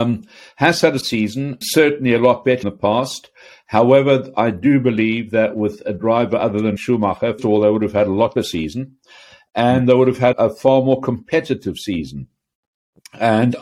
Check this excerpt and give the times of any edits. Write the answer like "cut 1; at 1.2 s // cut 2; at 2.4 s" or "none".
cut 1; at 1.0 s // cut 2; at 1.6 s // cut 3; at 2.6 s // cut 4; at 6.8 s // cut 5; at 7.4 s // cut 6; at 8.4 s // cut 7; at 10.3 s